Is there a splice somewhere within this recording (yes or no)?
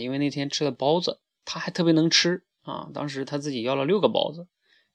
yes